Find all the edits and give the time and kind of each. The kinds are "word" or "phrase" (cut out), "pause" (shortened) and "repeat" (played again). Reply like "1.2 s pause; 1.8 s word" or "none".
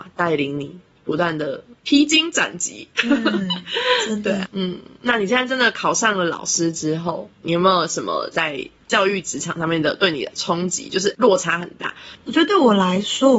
1.8 s pause; 4.4 s word; 7.3 s pause